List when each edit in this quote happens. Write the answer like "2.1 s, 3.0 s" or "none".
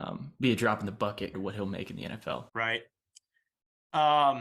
1.3 s, 2.5 s